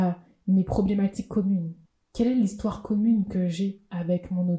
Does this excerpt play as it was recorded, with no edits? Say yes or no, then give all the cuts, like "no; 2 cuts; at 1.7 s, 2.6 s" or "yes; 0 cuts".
no; 1 cut; at 1.9 s